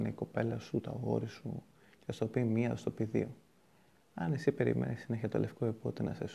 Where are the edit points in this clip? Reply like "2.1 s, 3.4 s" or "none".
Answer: none